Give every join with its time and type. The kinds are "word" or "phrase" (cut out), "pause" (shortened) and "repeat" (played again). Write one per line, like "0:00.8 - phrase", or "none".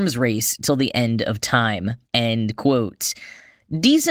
0:02.1 - pause